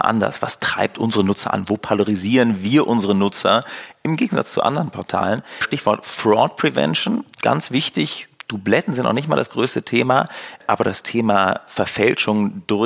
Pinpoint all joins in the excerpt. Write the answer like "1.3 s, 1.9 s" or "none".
7.3 s